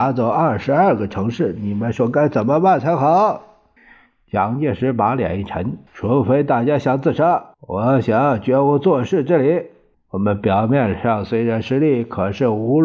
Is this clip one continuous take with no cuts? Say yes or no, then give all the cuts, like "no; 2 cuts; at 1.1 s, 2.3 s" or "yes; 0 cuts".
no; 4 cuts; at 3.8 s, 5.9 s, 7.5 s, 9.9 s